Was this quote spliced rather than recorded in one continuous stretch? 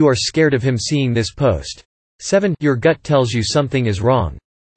no; 0 cuts

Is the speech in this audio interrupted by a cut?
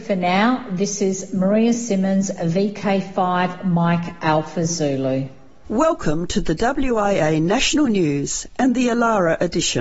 no; 0 cuts

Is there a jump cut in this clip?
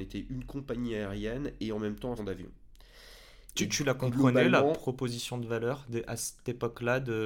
yes; 1 cut; at 2.2 s

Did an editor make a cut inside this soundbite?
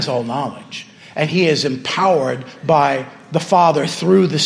no; 0 cuts

